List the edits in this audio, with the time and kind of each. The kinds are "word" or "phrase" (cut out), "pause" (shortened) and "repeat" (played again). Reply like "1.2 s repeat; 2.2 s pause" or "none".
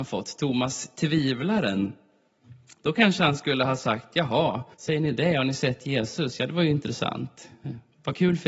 4.7 s pause